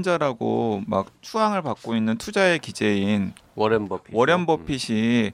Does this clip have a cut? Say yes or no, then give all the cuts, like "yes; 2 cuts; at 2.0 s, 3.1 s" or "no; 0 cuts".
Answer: yes; 1 cut; at 1.1 s